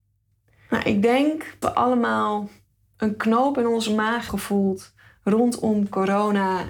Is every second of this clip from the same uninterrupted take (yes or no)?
no